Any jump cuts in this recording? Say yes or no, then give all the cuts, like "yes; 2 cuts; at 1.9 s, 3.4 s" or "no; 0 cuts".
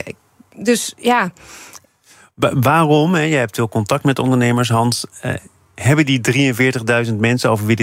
no; 0 cuts